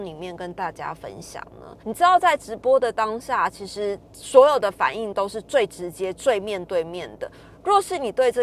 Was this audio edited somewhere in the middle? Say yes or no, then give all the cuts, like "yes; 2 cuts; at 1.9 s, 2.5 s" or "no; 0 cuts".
yes; 1 cut; at 1.8 s